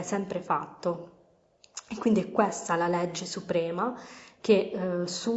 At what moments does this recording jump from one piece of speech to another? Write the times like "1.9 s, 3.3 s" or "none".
none